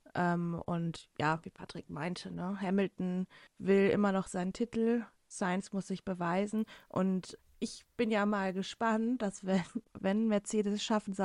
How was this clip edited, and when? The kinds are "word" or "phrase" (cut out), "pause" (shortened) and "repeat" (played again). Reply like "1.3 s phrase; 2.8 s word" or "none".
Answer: 3.5 s pause; 7.4 s word